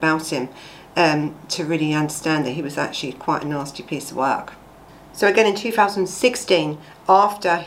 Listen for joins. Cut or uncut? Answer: uncut